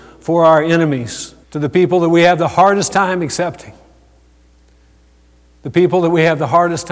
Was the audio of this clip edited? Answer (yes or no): yes